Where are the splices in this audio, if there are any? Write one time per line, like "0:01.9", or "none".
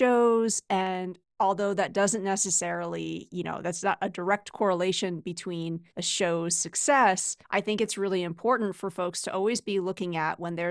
0:05.9
0:07.4